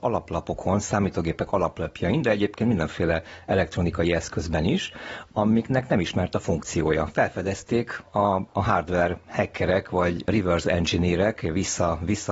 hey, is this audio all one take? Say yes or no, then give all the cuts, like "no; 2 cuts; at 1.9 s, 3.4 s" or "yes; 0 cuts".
yes; 0 cuts